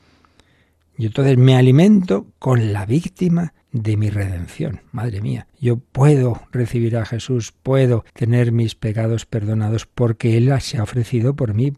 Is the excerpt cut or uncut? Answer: cut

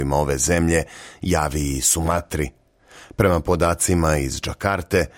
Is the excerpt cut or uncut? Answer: uncut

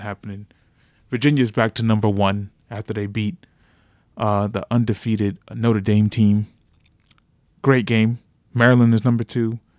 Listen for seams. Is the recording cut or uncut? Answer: uncut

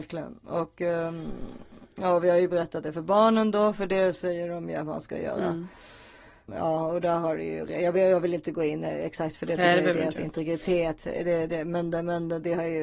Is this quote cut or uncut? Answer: cut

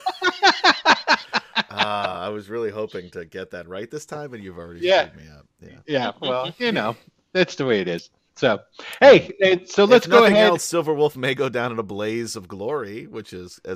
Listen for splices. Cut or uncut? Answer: uncut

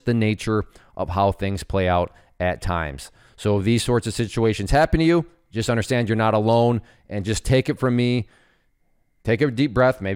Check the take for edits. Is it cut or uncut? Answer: uncut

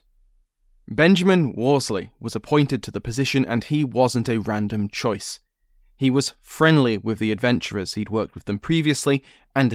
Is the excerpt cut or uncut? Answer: uncut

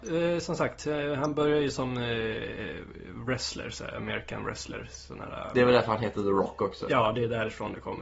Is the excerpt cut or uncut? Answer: uncut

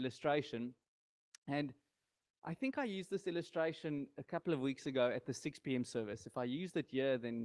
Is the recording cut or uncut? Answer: uncut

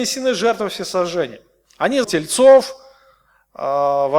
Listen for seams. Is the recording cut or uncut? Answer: cut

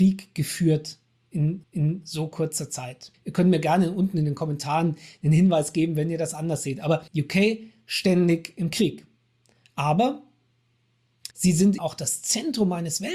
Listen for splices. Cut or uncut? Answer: cut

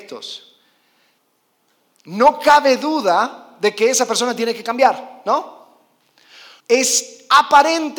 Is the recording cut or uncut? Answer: cut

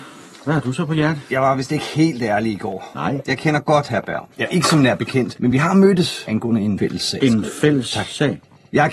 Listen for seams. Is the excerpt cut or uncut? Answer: uncut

